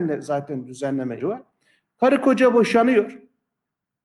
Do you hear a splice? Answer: yes; 1 cut; at 1.2 s

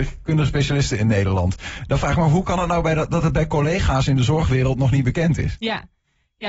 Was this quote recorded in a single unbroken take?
yes; 0 cuts

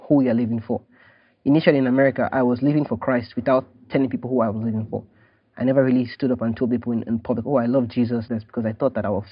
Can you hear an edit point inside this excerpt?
yes; 1 cut; at 8.3 s

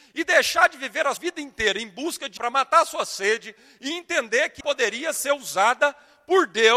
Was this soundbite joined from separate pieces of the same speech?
yes; 3 cuts; at 1.2 s, 2.4 s, 4.6 s

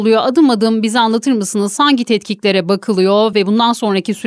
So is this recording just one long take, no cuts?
yes; 0 cuts

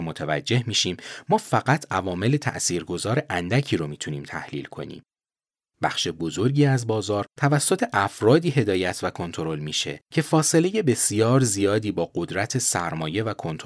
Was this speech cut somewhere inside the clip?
no; 0 cuts

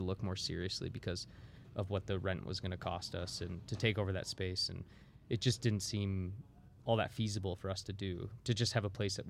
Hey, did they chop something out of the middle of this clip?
no; 0 cuts

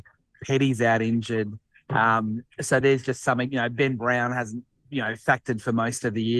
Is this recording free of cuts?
yes; 0 cuts

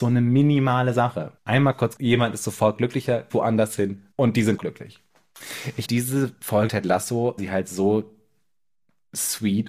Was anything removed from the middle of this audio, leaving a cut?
yes; 8 cuts; at 1.4 s, 2.0 s, 3.3 s, 4.1 s, 4.6 s, 5.8 s, 6.7 s, 7.4 s

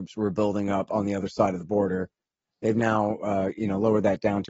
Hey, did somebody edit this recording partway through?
no; 0 cuts

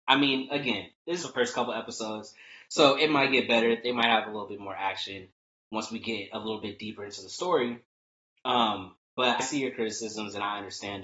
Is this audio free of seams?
no; 2 cuts; at 1.2 s, 9.4 s

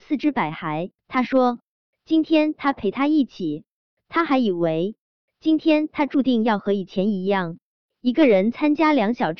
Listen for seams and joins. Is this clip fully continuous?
no; 1 cut; at 1.0 s

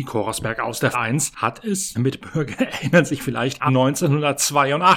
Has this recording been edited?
yes; 3 cuts; at 0.9 s, 1.9 s, 3.7 s

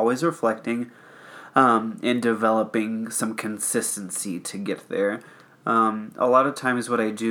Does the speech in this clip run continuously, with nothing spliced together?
yes; 0 cuts

